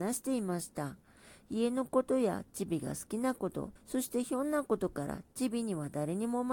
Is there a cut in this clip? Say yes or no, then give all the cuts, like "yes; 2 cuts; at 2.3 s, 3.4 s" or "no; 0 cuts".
yes; 1 cut; at 3.8 s